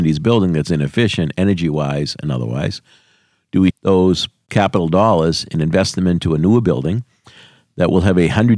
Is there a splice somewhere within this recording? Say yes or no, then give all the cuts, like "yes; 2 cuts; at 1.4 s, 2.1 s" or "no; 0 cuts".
yes; 1 cut; at 3.7 s